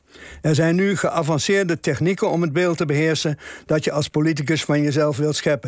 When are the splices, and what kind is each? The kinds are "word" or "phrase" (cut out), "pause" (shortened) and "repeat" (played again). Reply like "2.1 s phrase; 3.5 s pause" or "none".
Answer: none